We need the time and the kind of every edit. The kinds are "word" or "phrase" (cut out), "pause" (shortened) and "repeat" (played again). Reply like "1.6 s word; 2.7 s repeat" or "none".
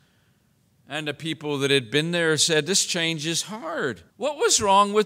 4.1 s pause

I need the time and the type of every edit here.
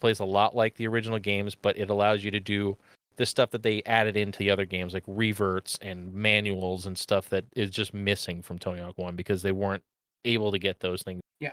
none

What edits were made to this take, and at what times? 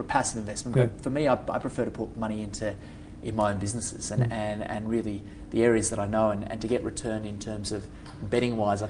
none

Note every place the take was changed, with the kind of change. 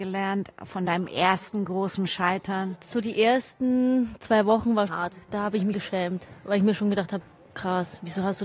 4.9 s word; 5.7 s word; 7.2 s word

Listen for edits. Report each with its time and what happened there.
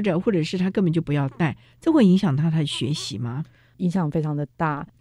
none

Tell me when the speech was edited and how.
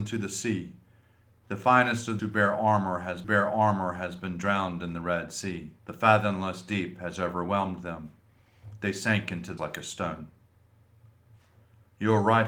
2.2 s word; 3.2 s repeat; 5.8 s pause; 9.6 s word

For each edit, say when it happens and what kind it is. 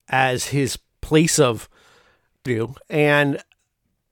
2.5 s phrase

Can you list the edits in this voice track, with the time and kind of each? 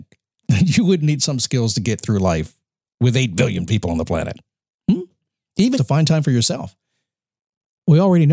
5.7 s word

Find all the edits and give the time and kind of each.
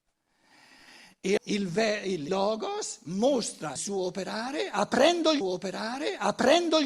1.4 s word; 2.3 s word; 3.8 s word; 5.4 s repeat

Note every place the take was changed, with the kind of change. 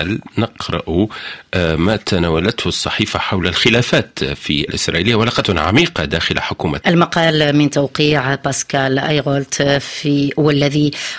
4.7 s word; 5.4 s phrase; 6.8 s word

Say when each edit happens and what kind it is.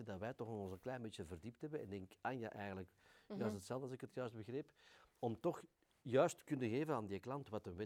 none

